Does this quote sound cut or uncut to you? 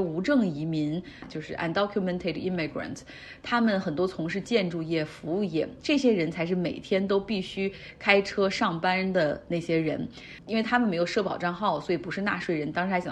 uncut